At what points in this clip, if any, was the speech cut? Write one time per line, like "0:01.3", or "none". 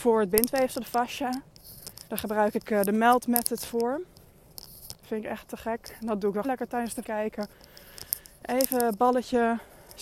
0:02.1
0:06.4
0:07.0